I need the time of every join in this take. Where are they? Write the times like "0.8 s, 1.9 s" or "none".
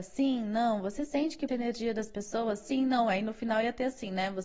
1.5 s